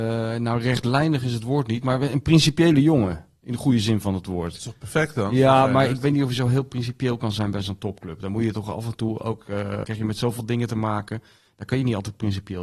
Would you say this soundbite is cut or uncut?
cut